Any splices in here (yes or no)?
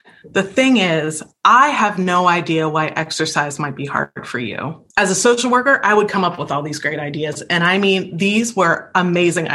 yes